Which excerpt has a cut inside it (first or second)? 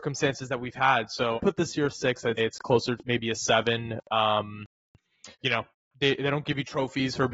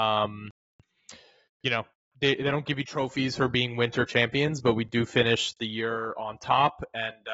first